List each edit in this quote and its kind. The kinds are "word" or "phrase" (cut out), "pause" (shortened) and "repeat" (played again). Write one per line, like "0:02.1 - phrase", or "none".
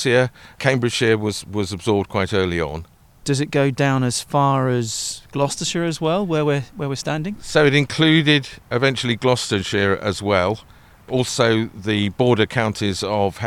none